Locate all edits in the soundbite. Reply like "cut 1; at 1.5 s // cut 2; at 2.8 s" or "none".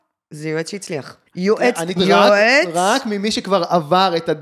cut 1; at 1.3 s // cut 2; at 2.0 s